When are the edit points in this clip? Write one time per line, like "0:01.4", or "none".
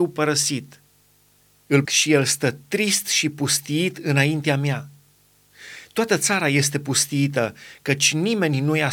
0:01.8